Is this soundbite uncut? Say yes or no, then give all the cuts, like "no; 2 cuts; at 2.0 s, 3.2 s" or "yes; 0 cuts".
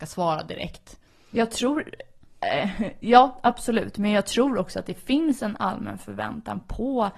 yes; 0 cuts